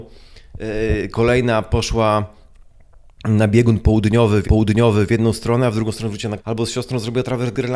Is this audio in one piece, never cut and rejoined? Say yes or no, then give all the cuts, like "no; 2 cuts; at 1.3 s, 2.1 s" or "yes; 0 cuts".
no; 2 cuts; at 4.4 s, 6.4 s